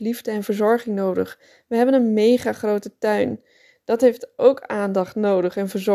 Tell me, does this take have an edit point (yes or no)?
no